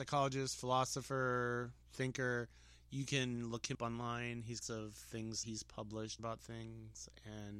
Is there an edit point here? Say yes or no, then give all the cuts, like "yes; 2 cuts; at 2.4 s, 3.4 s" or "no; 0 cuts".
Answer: yes; 4 cuts; at 3.7 s, 4.6 s, 5.4 s, 6.2 s